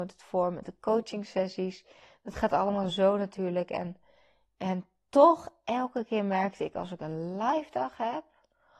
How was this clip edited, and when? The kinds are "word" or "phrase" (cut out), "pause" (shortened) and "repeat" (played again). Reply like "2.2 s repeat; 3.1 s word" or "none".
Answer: none